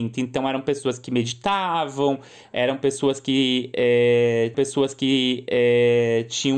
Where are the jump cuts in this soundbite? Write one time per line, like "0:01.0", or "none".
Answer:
0:04.5